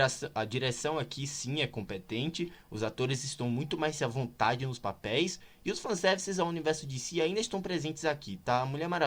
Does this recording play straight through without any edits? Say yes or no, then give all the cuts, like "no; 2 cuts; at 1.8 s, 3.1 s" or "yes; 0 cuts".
yes; 0 cuts